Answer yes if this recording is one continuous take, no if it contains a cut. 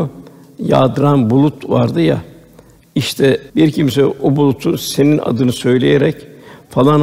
no